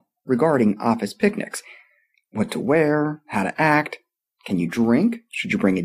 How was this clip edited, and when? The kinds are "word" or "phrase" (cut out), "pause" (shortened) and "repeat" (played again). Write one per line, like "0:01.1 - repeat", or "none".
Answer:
none